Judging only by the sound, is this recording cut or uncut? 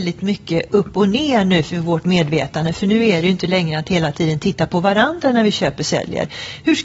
uncut